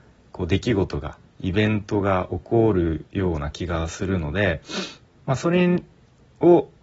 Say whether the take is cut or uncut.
uncut